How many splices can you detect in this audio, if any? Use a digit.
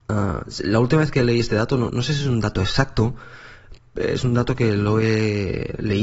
0